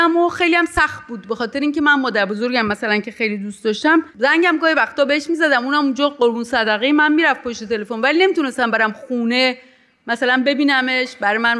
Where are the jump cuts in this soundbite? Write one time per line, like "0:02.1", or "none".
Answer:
0:04.1